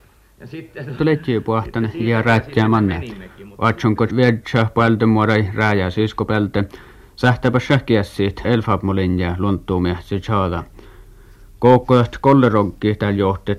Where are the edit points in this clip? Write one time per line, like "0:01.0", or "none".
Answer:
0:01.0
0:02.2
0:04.1
0:08.4

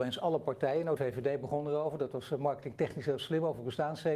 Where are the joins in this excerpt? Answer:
0:01.0

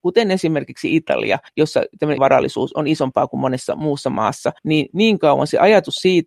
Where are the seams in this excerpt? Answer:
0:01.5
0:02.2
0:04.6

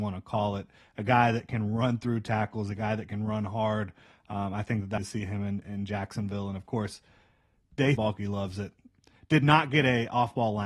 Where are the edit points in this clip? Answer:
0:05.0
0:08.0

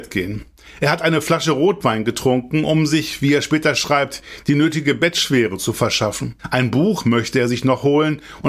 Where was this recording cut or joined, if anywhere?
0:06.4

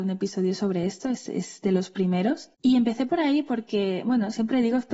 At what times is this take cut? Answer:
0:02.5

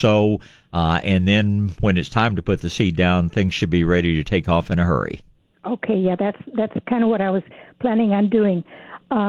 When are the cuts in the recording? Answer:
none

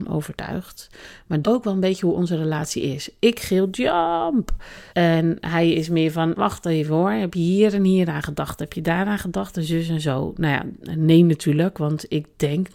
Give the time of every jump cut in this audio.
0:01.4
0:04.9
0:06.4

